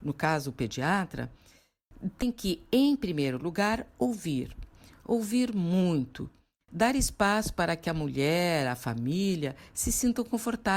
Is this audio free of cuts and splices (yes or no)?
yes